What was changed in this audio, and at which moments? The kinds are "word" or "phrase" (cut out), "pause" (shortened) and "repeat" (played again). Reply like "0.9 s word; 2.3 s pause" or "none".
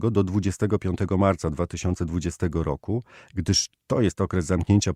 none